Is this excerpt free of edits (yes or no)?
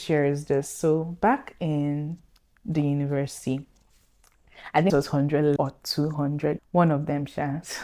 no